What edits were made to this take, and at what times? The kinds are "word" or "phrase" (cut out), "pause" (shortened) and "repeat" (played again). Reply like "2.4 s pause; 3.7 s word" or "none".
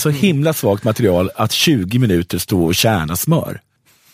none